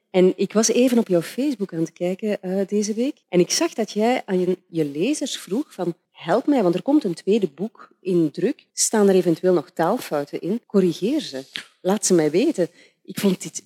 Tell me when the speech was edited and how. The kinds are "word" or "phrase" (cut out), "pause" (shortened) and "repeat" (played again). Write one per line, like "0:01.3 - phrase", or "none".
0:03.2 - pause
0:06.0 - pause
0:08.7 - pause
0:10.6 - pause